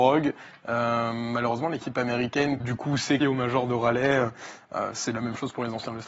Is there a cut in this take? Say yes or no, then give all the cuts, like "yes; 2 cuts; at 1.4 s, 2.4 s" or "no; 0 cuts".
yes; 2 cuts; at 2.6 s, 3.2 s